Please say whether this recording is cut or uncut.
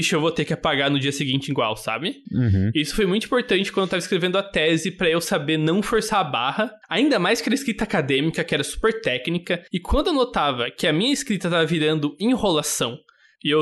cut